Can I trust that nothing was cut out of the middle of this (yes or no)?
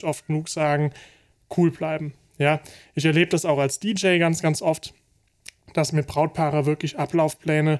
yes